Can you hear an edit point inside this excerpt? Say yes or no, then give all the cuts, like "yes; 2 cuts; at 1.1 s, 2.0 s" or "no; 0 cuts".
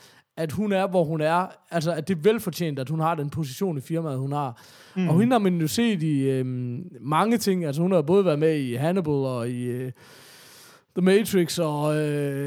no; 0 cuts